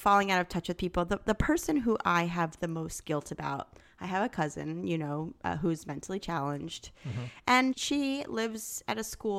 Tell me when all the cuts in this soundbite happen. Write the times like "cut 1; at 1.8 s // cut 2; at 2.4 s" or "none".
cut 1; at 7.7 s